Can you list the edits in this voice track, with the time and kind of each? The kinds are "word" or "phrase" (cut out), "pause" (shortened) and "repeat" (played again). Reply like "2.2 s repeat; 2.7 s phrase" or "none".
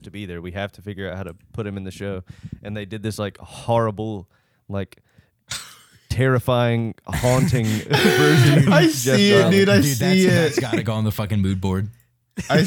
none